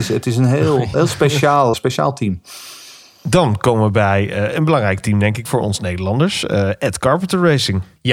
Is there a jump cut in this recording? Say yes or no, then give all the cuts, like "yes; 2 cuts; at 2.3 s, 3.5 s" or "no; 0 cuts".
yes; 3 cuts; at 0.9 s, 1.7 s, 5.5 s